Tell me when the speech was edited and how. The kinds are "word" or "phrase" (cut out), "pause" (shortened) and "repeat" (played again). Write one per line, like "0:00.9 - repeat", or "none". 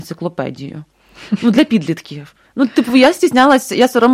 none